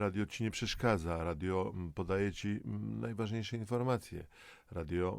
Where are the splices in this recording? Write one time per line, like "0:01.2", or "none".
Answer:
none